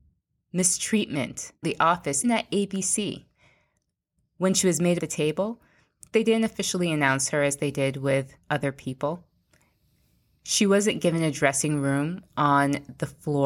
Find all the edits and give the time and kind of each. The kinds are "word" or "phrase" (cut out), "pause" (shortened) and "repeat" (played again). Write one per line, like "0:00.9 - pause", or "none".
0:01.6 - word
0:02.2 - word
0:05.0 - phrase
0:08.4 - pause